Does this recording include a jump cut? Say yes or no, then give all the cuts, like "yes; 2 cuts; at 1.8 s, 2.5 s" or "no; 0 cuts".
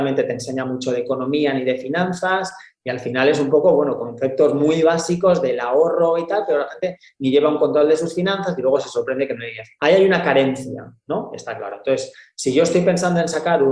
no; 0 cuts